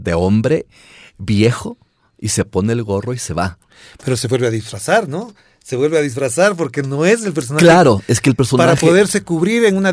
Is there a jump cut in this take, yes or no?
no